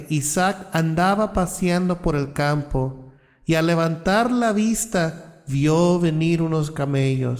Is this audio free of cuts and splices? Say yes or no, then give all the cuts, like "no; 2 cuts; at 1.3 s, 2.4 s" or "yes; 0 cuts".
yes; 0 cuts